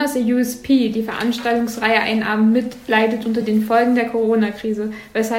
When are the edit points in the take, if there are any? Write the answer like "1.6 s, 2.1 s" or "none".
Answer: none